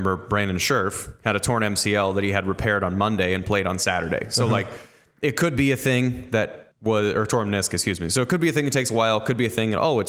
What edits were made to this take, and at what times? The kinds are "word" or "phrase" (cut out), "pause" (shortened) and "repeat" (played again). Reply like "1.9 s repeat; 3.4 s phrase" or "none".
6.7 s pause